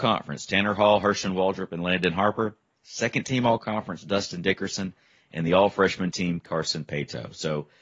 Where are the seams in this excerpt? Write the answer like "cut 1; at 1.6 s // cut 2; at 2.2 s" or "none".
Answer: none